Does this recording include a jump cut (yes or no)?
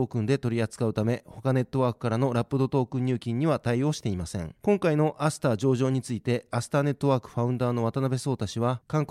no